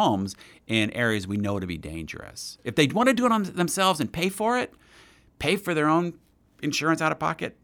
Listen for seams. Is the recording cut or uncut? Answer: uncut